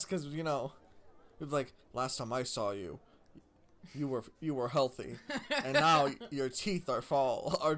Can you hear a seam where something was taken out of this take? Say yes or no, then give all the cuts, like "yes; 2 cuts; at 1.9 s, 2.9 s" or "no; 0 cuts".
no; 0 cuts